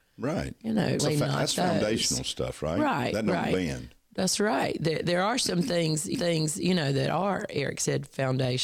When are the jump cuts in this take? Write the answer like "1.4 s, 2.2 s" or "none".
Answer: 1.0 s, 6.1 s